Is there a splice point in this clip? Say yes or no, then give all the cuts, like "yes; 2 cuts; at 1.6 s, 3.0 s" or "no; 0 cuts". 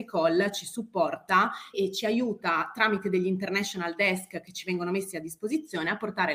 yes; 1 cut; at 1.7 s